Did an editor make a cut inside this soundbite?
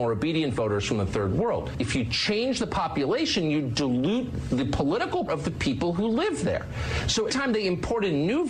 yes; 2 cuts; at 5.3 s, 7.3 s

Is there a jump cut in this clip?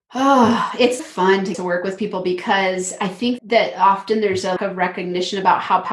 yes; 4 cuts; at 1.0 s, 1.5 s, 3.4 s, 4.6 s

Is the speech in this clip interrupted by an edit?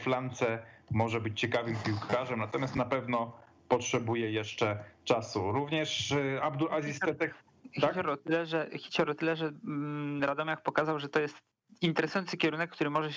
no; 0 cuts

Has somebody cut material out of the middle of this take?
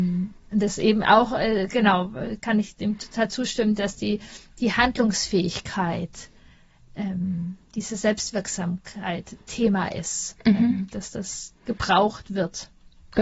no; 0 cuts

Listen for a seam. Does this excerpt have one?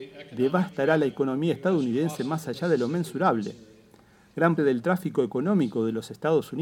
yes; 1 cut; at 4.6 s

